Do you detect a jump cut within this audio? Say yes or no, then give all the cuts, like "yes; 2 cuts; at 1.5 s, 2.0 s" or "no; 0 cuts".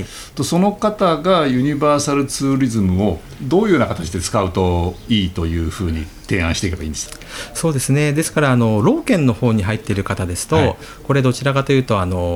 no; 0 cuts